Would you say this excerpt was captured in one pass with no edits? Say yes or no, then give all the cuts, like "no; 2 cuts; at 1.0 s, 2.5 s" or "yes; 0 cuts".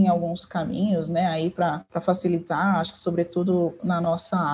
yes; 0 cuts